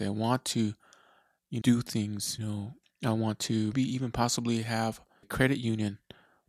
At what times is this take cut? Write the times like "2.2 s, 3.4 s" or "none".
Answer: 1.6 s, 2.4 s, 2.8 s, 3.7 s, 5.2 s